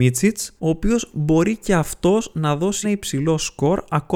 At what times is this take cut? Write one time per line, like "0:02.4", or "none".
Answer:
0:02.8